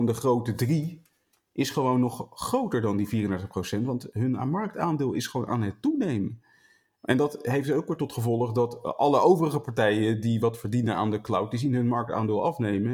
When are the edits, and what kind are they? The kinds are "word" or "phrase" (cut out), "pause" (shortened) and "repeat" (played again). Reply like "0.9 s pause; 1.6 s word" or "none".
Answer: none